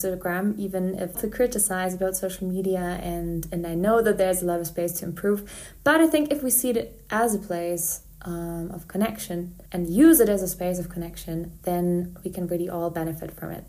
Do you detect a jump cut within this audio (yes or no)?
yes